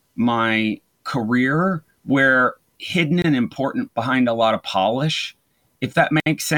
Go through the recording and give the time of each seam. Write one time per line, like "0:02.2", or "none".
0:02.7
0:03.9